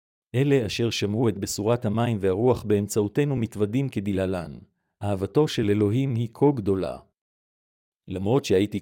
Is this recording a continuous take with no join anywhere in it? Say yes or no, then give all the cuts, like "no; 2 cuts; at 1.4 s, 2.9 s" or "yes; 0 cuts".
yes; 0 cuts